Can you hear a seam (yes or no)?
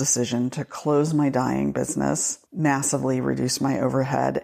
yes